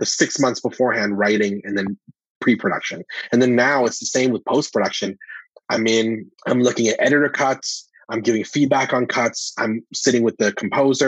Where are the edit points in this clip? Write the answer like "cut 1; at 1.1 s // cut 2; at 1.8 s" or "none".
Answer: cut 1; at 6.4 s